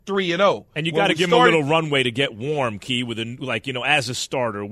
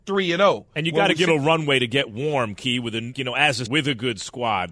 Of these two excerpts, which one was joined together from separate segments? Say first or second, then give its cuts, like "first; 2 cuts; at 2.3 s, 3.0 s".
second; 3 cuts; at 1.3 s, 3.1 s, 3.7 s